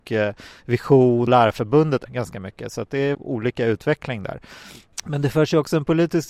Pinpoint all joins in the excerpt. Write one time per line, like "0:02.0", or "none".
0:01.3
0:02.1
0:03.1

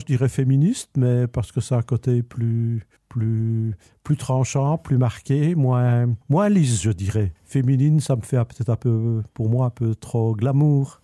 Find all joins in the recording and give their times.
0:03.0
0:06.2
0:07.4

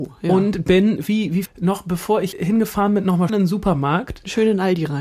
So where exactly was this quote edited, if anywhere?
0:01.0
0:01.4
0:02.3
0:03.3

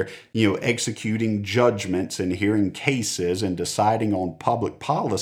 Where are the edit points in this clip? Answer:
none

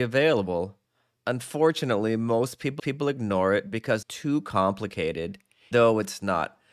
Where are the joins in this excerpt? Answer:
0:02.8
0:04.0
0:05.7

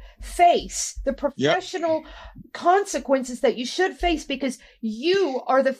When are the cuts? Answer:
none

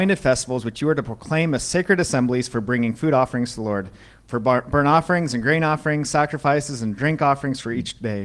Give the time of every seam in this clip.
none

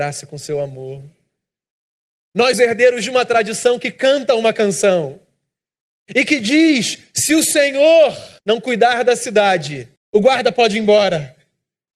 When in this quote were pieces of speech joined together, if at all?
0:02.5
0:08.4
0:10.0

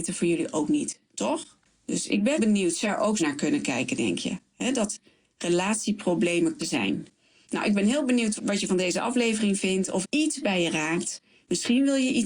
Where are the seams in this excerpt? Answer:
0:02.4
0:02.9
0:03.2
0:06.6
0:08.4
0:10.0

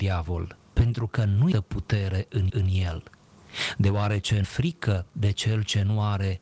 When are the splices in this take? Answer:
0:01.5
0:02.5
0:04.4

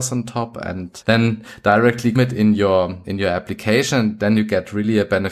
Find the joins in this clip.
0:01.0
0:02.1
0:03.0

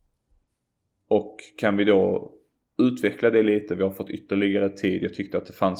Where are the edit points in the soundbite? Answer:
none

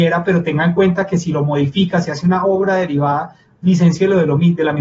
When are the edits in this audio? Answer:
none

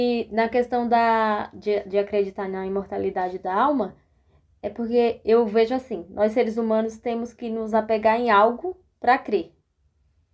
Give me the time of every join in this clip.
none

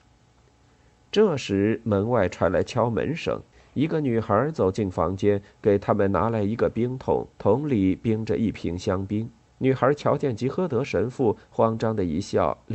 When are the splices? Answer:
0:03.5
0:07.3
0:09.5

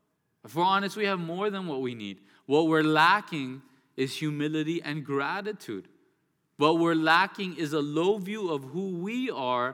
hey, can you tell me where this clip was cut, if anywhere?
none

